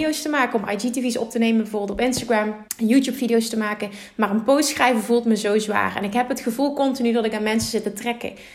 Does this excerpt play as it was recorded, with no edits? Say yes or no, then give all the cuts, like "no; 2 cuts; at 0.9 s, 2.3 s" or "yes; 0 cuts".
no; 1 cut; at 2.7 s